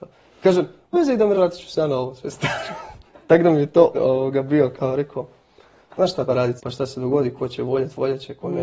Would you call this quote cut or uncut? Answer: cut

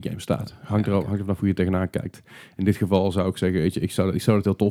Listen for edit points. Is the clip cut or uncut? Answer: uncut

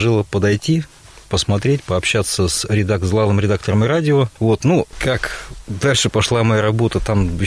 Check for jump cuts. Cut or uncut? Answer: uncut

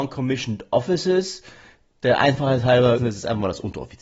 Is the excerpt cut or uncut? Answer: cut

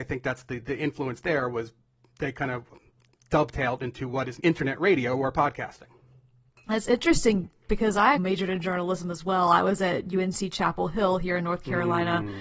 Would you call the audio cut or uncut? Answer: cut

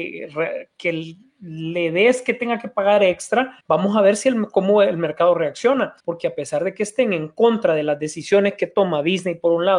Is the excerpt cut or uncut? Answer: cut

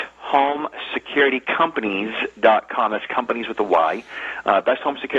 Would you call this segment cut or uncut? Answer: uncut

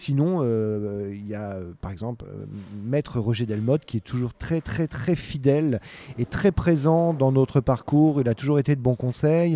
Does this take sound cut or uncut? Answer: cut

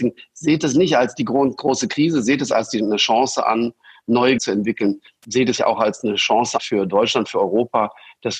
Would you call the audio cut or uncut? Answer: cut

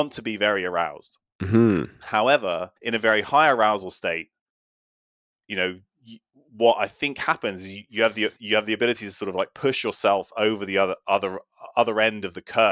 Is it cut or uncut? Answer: cut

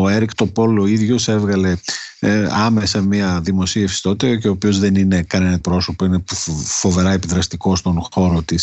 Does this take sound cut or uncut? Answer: cut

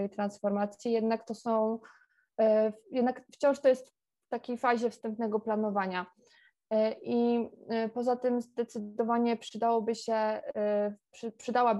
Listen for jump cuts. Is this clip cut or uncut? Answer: uncut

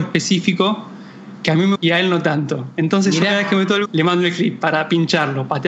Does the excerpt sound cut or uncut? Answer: cut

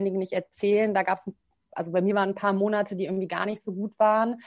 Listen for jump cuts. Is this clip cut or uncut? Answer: uncut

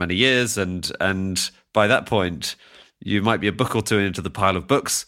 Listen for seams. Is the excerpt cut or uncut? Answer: uncut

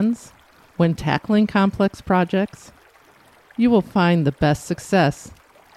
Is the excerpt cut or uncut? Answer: uncut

